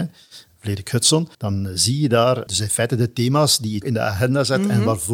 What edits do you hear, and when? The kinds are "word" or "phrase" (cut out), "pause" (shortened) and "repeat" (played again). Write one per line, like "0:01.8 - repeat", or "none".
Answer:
0:01.3 - pause
0:02.5 - word
0:03.8 - phrase